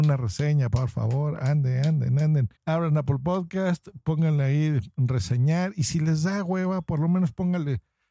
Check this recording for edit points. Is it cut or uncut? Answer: cut